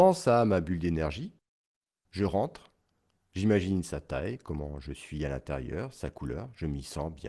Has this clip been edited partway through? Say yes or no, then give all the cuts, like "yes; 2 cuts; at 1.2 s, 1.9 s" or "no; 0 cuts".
no; 0 cuts